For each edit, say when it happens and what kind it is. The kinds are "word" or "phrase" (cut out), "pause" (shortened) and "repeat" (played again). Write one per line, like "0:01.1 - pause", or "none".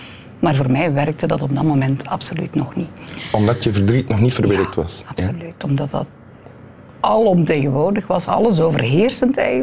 none